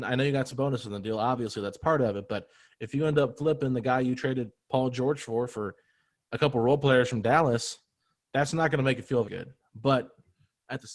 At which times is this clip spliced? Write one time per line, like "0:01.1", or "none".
0:09.2